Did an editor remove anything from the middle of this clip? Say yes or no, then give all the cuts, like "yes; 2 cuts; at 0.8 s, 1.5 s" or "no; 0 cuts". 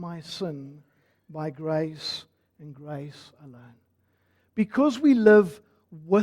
no; 0 cuts